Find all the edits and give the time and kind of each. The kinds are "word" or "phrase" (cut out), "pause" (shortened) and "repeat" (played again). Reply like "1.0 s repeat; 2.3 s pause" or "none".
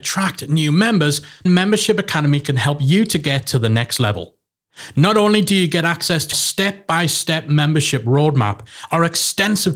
1.5 s word; 6.3 s word